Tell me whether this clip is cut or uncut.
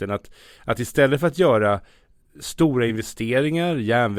uncut